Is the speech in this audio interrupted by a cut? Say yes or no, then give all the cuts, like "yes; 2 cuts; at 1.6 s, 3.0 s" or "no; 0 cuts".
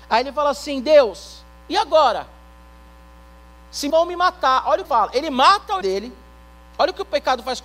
yes; 3 cuts; at 3.9 s, 4.8 s, 5.8 s